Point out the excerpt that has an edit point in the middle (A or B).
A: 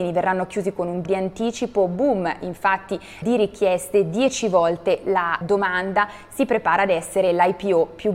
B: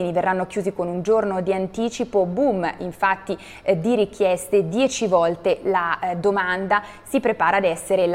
A